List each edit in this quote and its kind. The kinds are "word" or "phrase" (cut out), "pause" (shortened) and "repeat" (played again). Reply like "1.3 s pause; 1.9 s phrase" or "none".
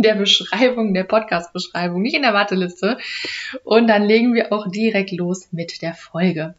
none

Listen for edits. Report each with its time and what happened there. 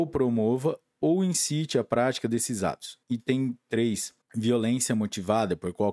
3.0 s pause; 4.2 s pause

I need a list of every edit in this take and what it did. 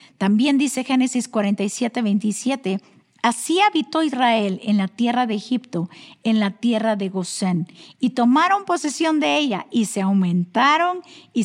none

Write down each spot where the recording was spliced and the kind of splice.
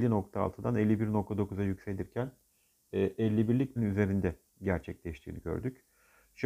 3.8 s word

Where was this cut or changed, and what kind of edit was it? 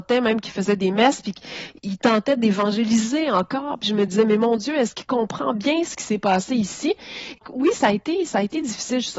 none

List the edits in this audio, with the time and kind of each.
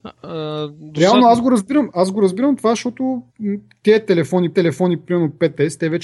3.3 s pause; 4.5 s repeat

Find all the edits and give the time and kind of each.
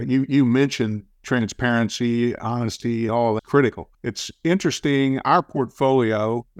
3.1 s word; 3.4 s word; 3.9 s pause

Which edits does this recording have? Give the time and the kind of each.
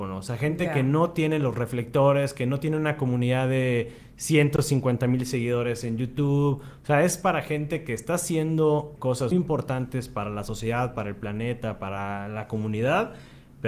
9.0 s word; 9.3 s word

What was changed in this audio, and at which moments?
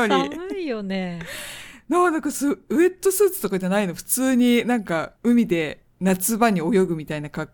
5.2 s pause

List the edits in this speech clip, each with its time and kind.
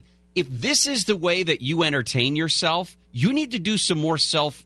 3.0 s pause

